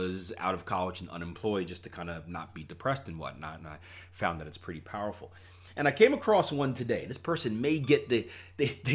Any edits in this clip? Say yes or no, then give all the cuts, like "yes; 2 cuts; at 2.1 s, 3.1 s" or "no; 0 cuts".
no; 0 cuts